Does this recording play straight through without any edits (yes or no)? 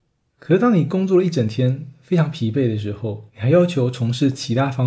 no